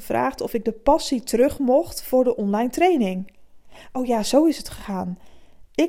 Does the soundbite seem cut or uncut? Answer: uncut